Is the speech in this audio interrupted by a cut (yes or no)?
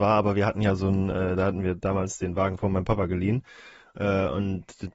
no